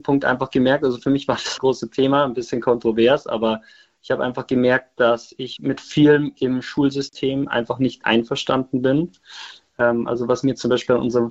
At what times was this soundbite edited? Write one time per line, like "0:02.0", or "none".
0:01.6
0:05.6
0:08.0